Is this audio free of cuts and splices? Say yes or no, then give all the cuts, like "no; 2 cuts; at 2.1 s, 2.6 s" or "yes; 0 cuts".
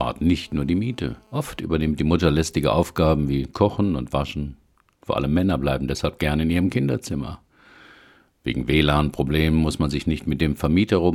no; 1 cut; at 1.2 s